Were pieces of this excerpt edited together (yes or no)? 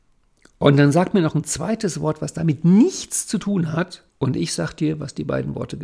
yes